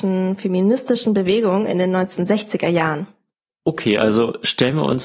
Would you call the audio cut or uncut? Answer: uncut